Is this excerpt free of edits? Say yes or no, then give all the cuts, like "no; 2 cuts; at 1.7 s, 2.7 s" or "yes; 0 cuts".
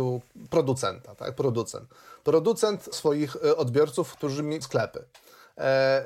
no; 2 cuts; at 2.9 s, 4.6 s